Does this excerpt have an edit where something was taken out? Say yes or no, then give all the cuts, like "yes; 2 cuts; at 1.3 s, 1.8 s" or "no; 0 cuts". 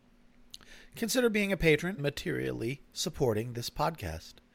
yes; 2 cuts; at 2.0 s, 2.8 s